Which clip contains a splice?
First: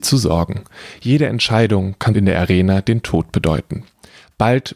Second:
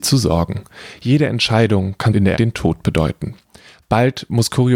second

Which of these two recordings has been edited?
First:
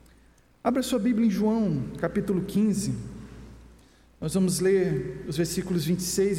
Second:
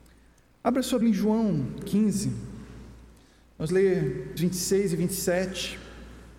second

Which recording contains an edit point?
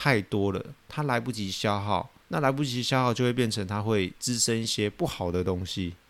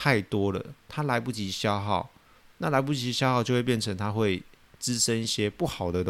first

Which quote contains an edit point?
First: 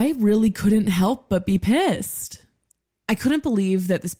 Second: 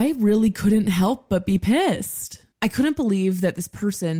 second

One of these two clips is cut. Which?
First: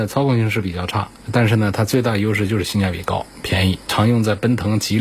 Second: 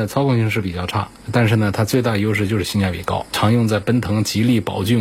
second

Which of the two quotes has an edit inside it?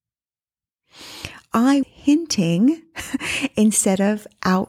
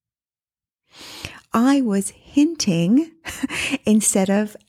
first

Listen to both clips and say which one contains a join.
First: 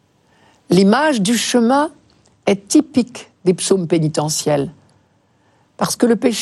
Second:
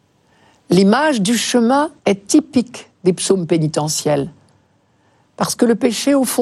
second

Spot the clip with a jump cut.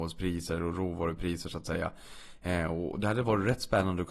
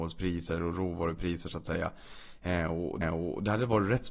second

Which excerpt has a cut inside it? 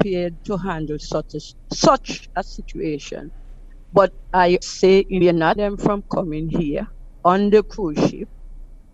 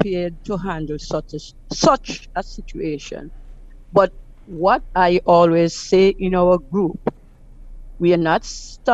first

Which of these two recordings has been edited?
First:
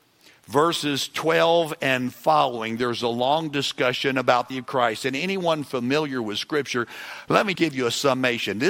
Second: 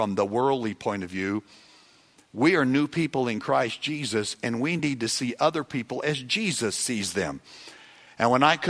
first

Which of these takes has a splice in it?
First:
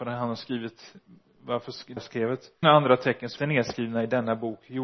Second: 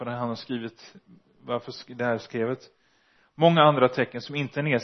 first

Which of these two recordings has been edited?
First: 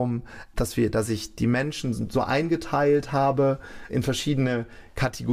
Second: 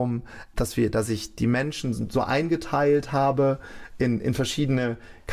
first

